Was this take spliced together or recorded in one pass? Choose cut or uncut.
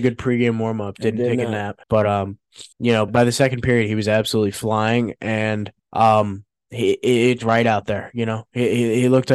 cut